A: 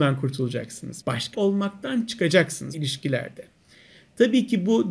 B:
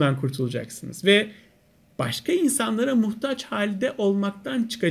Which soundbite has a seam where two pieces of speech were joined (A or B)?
A